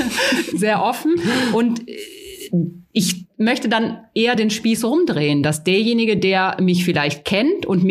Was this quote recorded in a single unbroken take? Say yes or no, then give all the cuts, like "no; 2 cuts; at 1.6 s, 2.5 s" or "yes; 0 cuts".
yes; 0 cuts